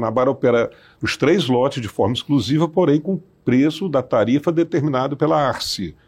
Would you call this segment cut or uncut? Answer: uncut